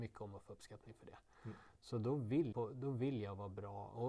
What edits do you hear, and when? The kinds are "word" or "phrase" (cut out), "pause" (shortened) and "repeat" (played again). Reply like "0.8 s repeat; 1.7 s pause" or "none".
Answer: 2.5 s word